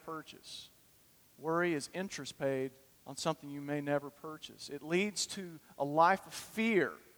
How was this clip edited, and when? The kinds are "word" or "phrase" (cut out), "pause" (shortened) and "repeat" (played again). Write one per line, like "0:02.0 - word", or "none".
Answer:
0:01.1 - pause
0:02.9 - pause